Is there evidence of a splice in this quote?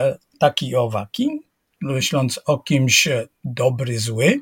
no; 0 cuts

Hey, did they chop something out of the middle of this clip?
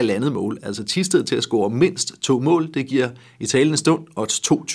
no; 0 cuts

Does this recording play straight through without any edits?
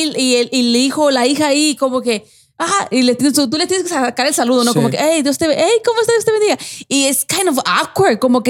yes; 0 cuts

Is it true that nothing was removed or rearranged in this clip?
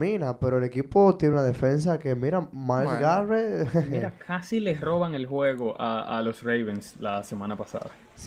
yes; 0 cuts

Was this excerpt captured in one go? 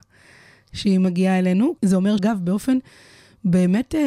no; 2 cuts; at 1.8 s, 2.2 s

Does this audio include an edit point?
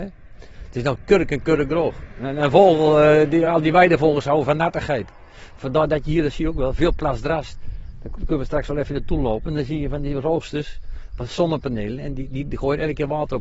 no; 0 cuts

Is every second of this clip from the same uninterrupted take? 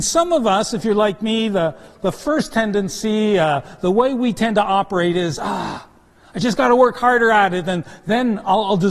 yes; 0 cuts

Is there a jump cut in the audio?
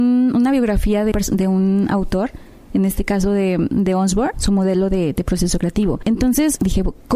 yes; 1 cut; at 1.1 s

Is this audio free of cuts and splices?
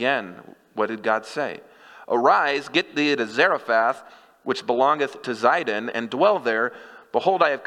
yes; 0 cuts

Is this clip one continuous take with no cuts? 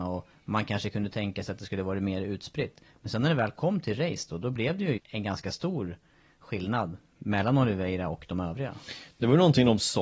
no; 1 cut; at 5.0 s

